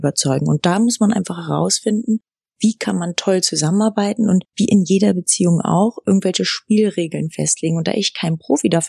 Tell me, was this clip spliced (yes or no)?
yes